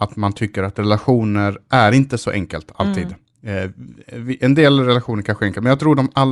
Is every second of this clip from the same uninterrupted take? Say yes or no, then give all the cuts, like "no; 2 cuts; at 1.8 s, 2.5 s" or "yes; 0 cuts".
yes; 0 cuts